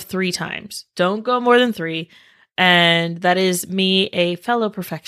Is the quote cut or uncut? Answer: uncut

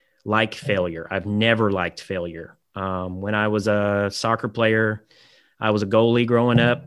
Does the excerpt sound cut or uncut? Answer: uncut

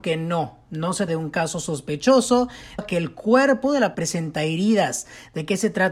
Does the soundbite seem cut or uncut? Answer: cut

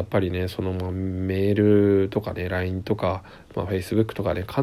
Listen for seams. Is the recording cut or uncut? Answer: uncut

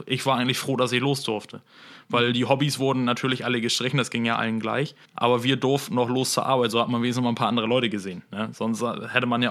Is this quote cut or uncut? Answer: cut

